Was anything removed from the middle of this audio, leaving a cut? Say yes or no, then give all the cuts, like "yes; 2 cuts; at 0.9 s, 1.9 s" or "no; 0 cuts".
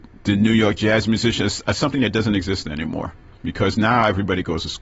no; 0 cuts